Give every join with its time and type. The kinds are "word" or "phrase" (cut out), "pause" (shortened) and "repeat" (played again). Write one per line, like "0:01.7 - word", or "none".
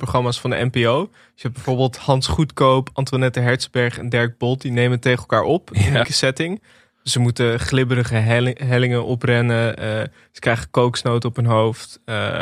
0:06.0 - word